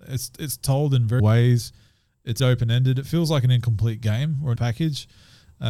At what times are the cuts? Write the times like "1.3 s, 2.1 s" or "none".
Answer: 1.2 s, 2.4 s, 4.6 s

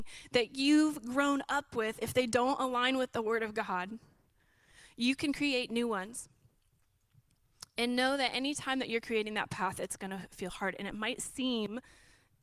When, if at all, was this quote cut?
none

